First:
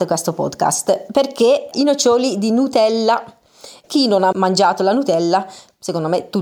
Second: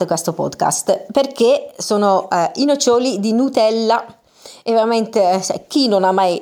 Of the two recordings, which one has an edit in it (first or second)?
first